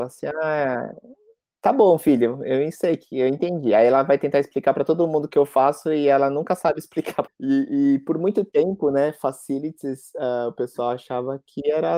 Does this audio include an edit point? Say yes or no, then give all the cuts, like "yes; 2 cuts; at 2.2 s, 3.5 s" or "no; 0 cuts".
no; 0 cuts